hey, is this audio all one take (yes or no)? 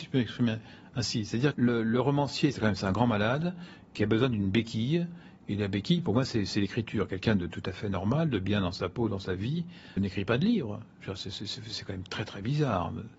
no